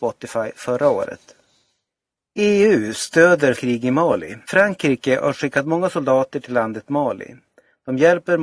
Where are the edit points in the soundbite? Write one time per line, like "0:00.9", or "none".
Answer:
0:01.9
0:03.5
0:04.4